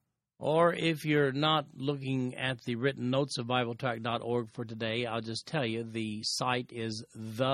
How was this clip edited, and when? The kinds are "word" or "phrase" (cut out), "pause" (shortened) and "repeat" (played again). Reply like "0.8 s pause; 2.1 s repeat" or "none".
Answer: none